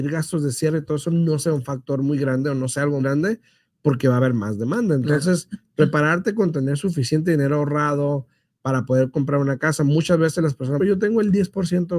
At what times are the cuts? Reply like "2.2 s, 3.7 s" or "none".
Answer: 3.0 s, 10.8 s